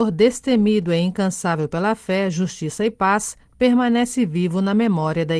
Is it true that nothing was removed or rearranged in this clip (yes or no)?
yes